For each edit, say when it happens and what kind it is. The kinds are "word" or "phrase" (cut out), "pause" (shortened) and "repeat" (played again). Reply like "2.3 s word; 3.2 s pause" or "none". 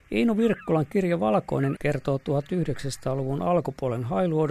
1.8 s word